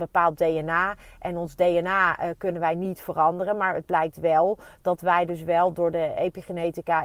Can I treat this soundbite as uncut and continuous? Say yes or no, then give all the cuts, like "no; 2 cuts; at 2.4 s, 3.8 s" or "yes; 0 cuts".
yes; 0 cuts